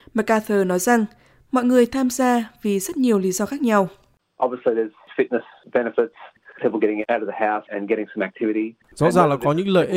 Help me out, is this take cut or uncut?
uncut